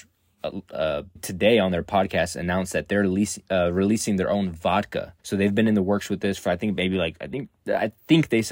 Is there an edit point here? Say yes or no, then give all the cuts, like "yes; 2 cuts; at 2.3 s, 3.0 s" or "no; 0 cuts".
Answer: yes; 2 cuts; at 1.2 s, 5.2 s